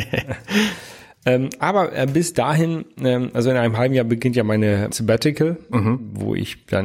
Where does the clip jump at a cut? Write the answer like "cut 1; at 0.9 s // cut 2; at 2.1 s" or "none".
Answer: cut 1; at 4.9 s